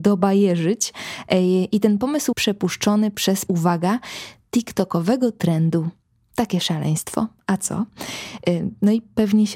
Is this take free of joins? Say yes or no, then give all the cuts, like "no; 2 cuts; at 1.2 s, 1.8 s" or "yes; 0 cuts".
no; 2 cuts; at 2.3 s, 3.5 s